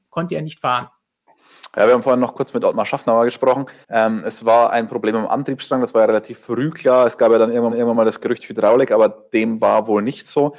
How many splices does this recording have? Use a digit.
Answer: 2